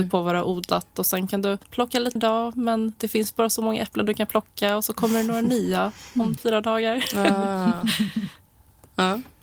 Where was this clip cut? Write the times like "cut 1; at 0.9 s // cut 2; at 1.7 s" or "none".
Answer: cut 1; at 1.6 s // cut 2; at 2.2 s // cut 3; at 6.4 s